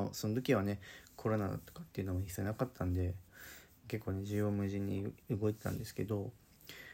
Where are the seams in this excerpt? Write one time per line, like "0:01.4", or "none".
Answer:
0:05.2